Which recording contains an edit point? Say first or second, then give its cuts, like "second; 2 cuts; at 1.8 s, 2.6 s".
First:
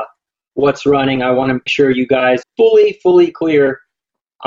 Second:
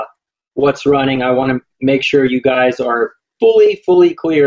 first; 2 cuts; at 1.7 s, 2.4 s